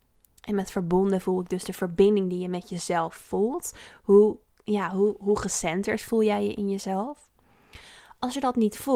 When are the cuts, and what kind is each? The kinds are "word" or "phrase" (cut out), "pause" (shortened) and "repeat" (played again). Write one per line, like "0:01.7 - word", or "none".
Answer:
none